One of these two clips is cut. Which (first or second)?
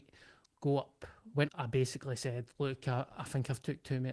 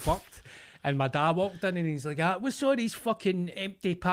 first